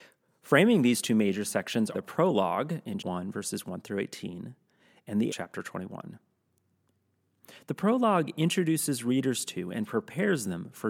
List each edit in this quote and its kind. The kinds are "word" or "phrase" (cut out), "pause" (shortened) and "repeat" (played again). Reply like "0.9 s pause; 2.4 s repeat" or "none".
1.9 s word; 3.0 s word; 5.3 s word